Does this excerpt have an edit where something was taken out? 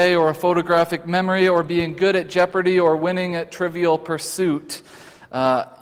no; 0 cuts

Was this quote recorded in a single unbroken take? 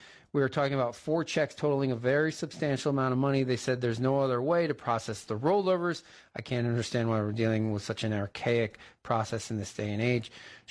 yes; 0 cuts

